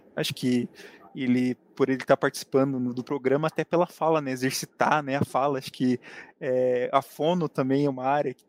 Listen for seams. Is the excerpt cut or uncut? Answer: uncut